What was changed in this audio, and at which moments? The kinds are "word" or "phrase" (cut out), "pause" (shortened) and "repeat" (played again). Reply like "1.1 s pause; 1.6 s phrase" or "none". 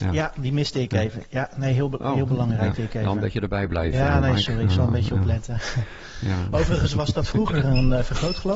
2.7 s word